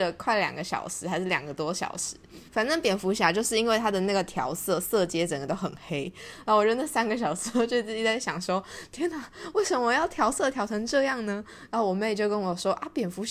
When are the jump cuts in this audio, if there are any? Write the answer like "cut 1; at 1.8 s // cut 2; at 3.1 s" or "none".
cut 1; at 2.5 s